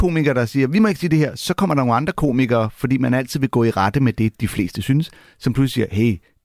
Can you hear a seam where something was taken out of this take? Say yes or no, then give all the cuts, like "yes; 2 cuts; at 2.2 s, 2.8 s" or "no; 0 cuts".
no; 0 cuts